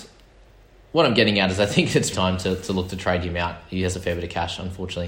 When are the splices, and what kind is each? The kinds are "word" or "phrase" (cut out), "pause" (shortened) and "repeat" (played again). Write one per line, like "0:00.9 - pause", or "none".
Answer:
0:02.1 - word
0:03.9 - word

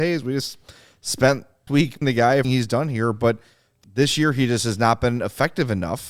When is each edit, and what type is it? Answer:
0:01.7 - word
0:02.0 - word
0:02.4 - phrase
0:03.8 - phrase

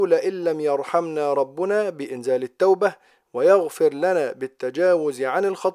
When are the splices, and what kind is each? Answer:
none

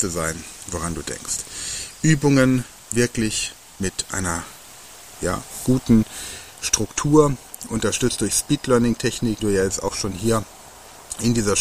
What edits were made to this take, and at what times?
0:09.4 - word

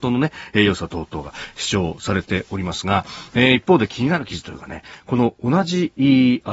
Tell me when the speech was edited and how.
none

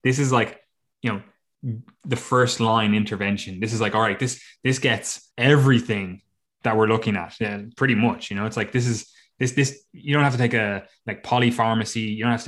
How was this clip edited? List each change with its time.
0:05.3 - pause

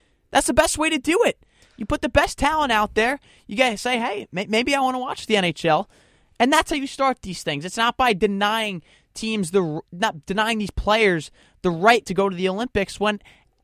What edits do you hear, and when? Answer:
none

